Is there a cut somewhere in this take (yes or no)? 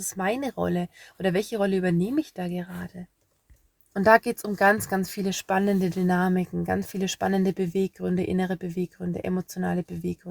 no